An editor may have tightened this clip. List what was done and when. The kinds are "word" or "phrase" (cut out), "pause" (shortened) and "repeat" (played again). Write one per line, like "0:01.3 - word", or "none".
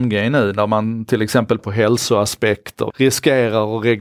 0:01.6 - word
0:02.9 - phrase